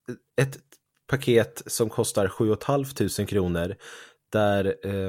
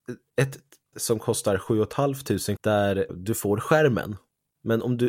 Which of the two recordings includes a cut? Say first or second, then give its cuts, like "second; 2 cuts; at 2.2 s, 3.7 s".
second; 3 cuts; at 0.9 s, 2.6 s, 3.1 s